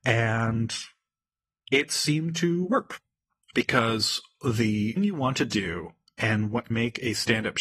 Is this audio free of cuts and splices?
no; 2 cuts; at 5.0 s, 6.7 s

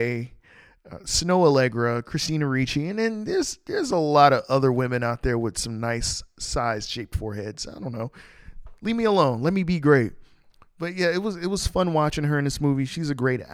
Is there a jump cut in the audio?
no; 0 cuts

